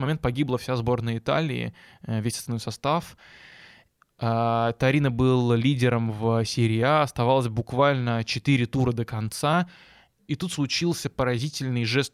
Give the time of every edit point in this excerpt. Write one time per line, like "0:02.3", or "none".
none